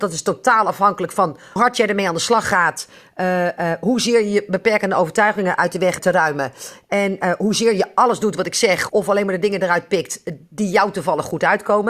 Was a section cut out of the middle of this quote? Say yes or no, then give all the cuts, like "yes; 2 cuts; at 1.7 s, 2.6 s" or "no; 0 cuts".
yes; 3 cuts; at 1.6 s, 6.0 s, 8.9 s